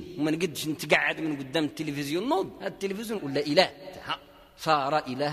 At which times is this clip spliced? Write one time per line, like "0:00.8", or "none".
0:03.2